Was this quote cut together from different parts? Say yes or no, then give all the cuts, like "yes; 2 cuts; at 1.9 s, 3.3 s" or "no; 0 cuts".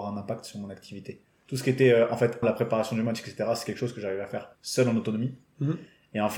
yes; 2 cuts; at 2.4 s, 4.5 s